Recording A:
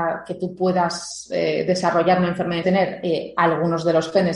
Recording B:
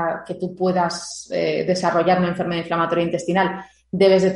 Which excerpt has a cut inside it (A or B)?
A